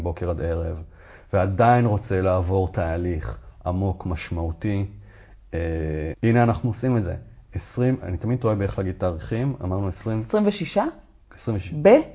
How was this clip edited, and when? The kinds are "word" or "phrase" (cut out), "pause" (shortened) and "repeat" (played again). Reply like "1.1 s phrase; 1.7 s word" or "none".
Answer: 6.1 s word